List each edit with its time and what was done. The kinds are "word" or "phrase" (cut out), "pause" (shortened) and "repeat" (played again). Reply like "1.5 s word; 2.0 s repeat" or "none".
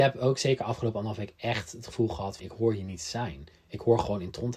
2.4 s word